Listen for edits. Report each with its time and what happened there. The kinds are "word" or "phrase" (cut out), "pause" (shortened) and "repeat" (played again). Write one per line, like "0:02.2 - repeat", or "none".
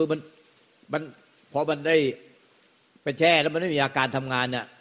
none